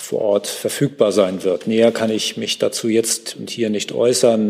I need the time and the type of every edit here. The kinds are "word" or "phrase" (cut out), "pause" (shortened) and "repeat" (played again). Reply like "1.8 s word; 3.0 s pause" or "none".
none